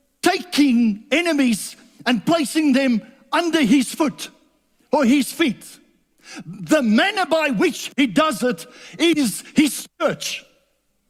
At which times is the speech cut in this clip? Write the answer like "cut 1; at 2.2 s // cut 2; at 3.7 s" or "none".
none